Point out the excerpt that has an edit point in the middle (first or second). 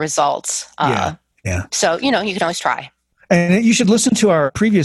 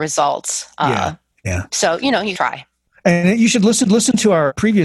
second